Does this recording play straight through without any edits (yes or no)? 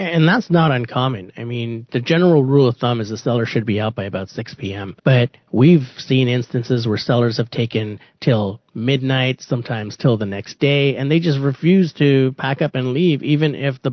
no